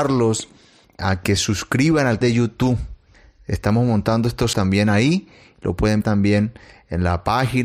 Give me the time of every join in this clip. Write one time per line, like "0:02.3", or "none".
0:01.4
0:02.2
0:04.5
0:06.0

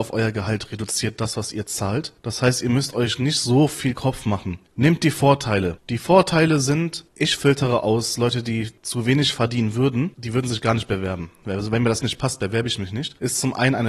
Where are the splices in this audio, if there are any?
0:12.0

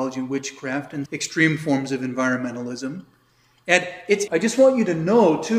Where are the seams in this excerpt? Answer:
0:01.1
0:04.3

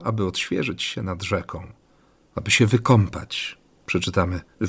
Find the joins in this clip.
none

